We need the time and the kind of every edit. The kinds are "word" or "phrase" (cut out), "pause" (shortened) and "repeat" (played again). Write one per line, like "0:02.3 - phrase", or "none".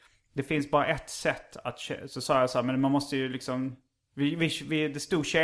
none